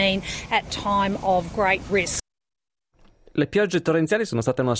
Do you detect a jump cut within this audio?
yes; 1 cut; at 1.9 s

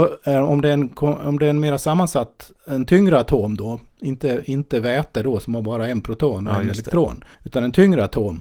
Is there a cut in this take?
yes; 1 cut; at 7.3 s

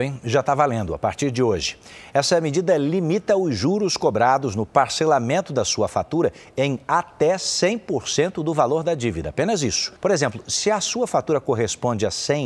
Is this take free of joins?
no; 1 cut; at 10.0 s

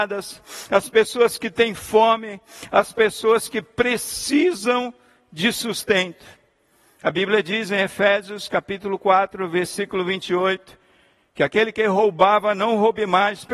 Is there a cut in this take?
no; 0 cuts

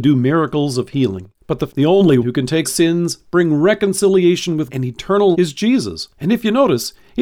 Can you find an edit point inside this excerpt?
yes; 7 cuts; at 1.3 s, 1.7 s, 2.2 s, 2.6 s, 4.7 s, 5.3 s, 6.1 s

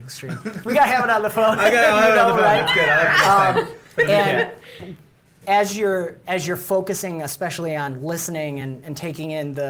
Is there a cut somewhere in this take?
no; 0 cuts

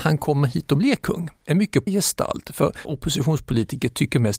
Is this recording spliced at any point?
yes; 2 cuts; at 1.9 s, 2.8 s

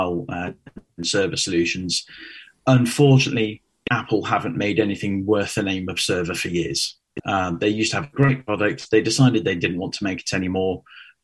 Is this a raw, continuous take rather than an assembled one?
yes; 0 cuts

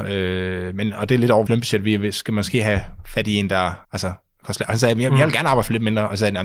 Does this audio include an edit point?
yes; 2 cuts; at 1.5 s, 3.8 s

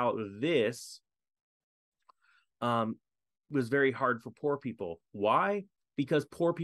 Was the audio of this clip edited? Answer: no; 0 cuts

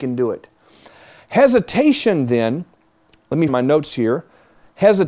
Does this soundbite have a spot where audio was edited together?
yes; 1 cut; at 3.5 s

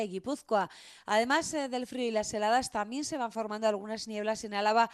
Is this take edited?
no; 0 cuts

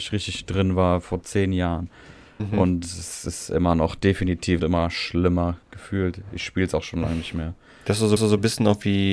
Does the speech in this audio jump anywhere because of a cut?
yes; 3 cuts; at 4.6 s, 5.6 s, 8.2 s

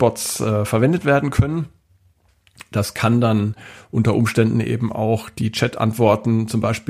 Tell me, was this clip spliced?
no; 0 cuts

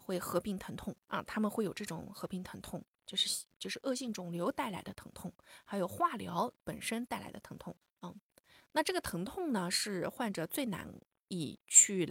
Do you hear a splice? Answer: yes; 2 cuts; at 1.0 s, 7.8 s

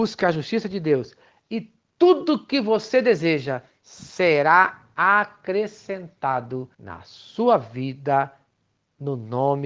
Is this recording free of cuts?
no; 1 cut; at 6.7 s

